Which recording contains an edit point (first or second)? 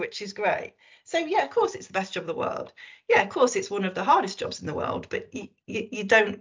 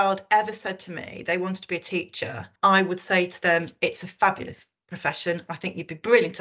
second